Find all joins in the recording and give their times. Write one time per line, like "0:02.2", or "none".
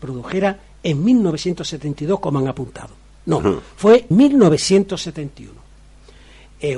0:04.1